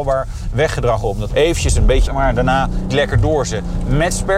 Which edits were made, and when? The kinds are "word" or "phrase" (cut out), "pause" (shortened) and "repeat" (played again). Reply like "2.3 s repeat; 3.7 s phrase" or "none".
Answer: 1.3 s word; 2.1 s word; 2.9 s word